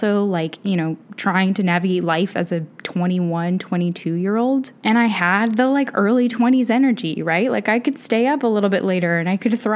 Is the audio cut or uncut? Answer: cut